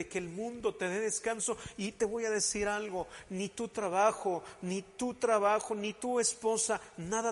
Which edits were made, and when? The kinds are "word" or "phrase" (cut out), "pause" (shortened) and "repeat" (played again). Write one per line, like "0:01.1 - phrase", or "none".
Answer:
none

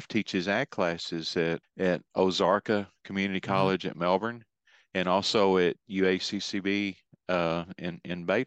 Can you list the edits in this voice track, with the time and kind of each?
0:01.6 - word

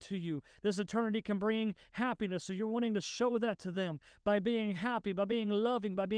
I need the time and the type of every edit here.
none

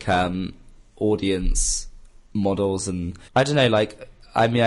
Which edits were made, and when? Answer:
0:03.3 - pause

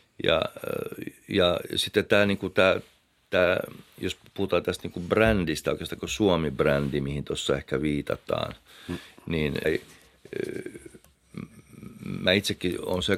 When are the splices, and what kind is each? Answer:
0:09.6 - phrase

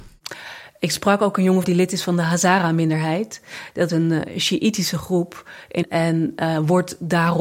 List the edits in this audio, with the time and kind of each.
0:01.6 - word
0:03.9 - word
0:05.8 - word

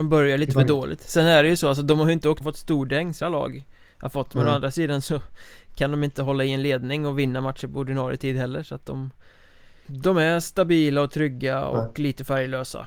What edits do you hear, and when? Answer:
0:02.4 - word
0:03.2 - word
0:09.8 - word

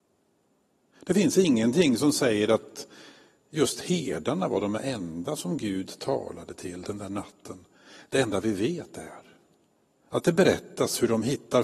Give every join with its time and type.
none

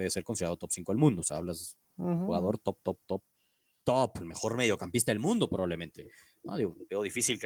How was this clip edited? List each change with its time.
none

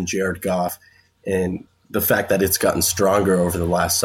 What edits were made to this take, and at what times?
none

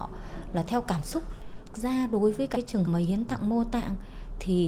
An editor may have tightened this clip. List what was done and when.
0:01.7 - word
0:02.5 - word
0:02.8 - word

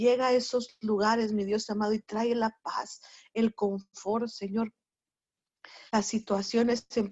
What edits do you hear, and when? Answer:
0:05.9 - pause

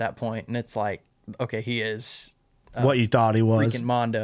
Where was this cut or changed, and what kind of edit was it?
none

